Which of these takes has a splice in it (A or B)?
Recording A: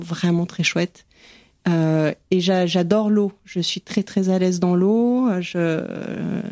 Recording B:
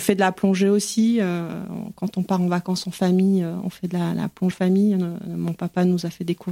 B